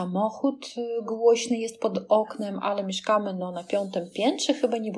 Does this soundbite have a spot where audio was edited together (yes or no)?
no